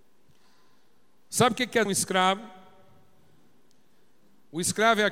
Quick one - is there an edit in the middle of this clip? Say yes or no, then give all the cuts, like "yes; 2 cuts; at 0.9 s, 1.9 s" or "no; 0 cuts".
yes; 1 cut; at 1.9 s